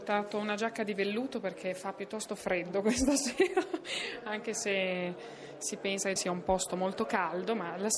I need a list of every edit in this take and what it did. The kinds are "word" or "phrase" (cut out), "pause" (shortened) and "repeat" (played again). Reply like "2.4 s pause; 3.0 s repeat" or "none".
6.2 s word